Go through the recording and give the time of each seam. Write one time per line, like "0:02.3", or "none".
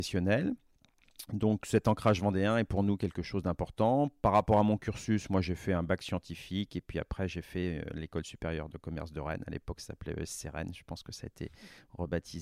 none